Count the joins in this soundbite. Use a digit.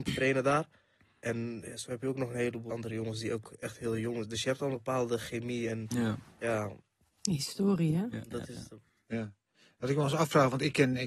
2